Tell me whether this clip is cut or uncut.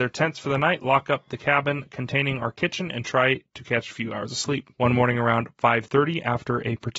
cut